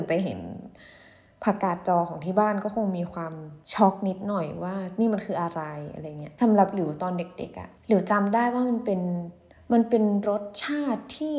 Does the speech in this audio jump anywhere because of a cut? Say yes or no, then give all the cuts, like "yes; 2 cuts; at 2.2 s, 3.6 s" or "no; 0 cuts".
yes; 3 cuts; at 3.6 s, 7.8 s, 9.5 s